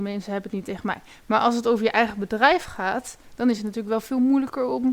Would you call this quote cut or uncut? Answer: uncut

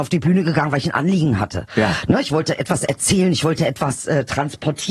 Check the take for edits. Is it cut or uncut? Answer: uncut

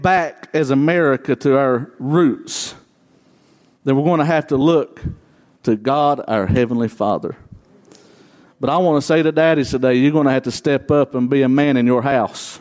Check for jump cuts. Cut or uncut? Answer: uncut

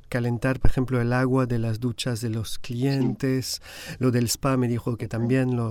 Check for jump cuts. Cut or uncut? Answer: uncut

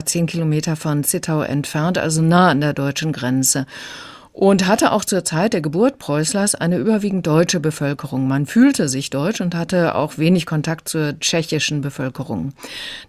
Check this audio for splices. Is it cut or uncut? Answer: uncut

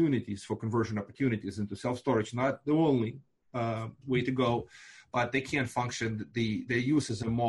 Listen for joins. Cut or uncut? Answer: uncut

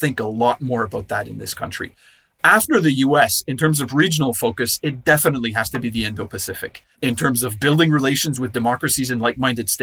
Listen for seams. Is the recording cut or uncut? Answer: cut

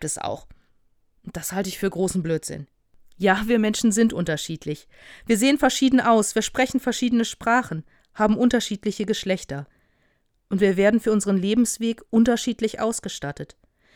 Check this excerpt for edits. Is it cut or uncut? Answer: uncut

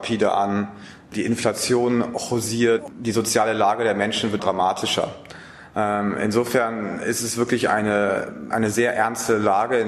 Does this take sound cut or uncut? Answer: cut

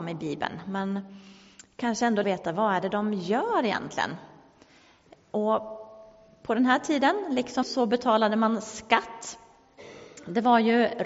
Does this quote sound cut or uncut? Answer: cut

